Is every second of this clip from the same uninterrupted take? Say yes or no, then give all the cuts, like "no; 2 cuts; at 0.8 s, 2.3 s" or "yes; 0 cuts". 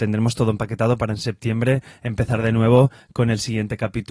yes; 0 cuts